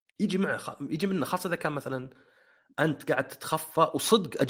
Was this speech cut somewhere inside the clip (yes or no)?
no